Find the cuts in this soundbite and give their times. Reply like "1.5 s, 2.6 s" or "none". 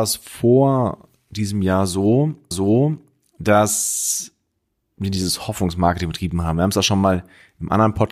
2.5 s